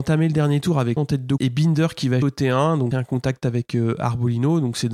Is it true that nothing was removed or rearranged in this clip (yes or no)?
no